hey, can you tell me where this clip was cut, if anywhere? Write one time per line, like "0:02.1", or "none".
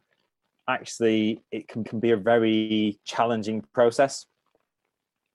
0:01.8